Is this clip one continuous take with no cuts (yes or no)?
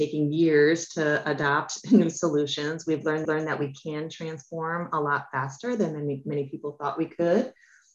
no